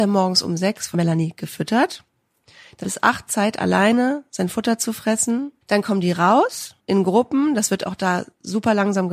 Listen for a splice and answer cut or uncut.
cut